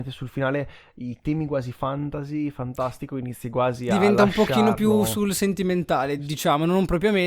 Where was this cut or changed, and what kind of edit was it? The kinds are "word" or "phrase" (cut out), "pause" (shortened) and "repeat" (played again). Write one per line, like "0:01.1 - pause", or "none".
none